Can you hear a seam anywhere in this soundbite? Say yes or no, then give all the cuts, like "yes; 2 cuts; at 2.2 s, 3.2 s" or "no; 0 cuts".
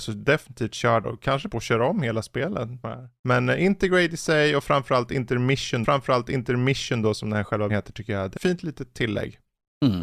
yes; 6 cuts; at 1.0 s, 1.5 s, 2.8 s, 5.8 s, 7.7 s, 8.4 s